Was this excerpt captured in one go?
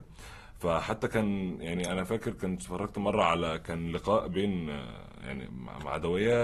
yes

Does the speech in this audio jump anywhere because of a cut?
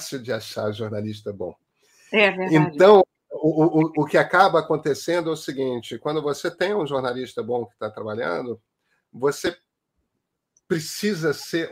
no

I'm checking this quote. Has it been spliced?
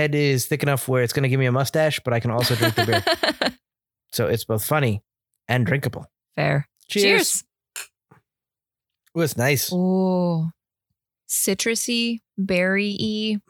no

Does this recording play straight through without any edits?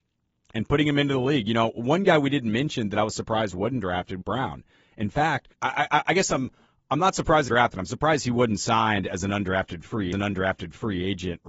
no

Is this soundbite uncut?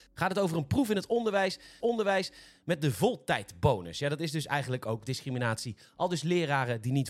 no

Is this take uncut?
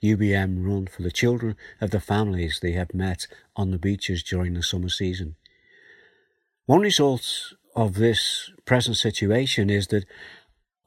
no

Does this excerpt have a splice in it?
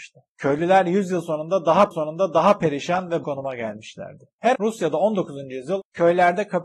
yes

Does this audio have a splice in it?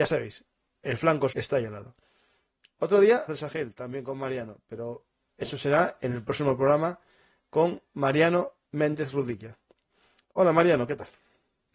yes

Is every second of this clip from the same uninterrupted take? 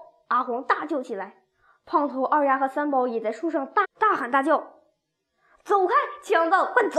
yes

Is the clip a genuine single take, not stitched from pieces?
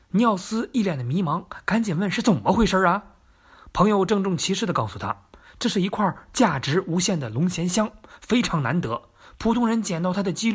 yes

